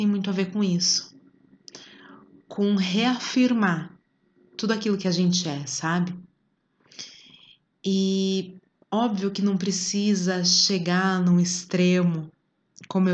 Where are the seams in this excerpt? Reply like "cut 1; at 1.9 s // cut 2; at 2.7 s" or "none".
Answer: none